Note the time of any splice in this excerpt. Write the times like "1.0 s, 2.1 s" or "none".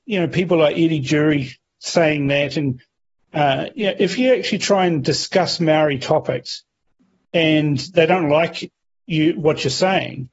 none